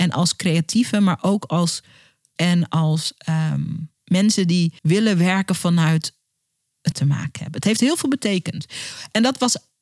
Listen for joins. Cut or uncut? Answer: cut